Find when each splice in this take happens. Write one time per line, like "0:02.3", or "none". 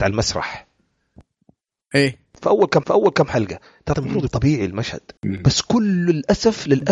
0:02.8
0:03.9
0:04.3
0:05.2

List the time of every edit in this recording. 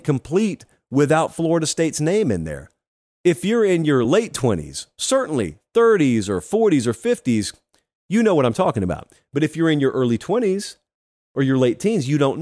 none

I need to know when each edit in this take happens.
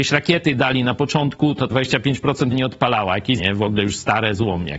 0:01.7
0:02.5
0:03.4

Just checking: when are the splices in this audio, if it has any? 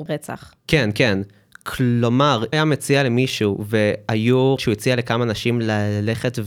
0:02.5
0:04.6

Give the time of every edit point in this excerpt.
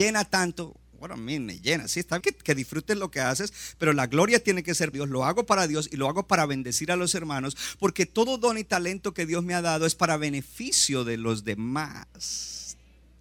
0:02.2
0:04.9

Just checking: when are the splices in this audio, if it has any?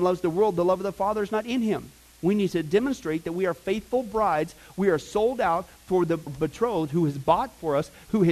0:06.3

